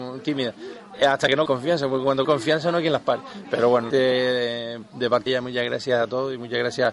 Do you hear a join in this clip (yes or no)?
yes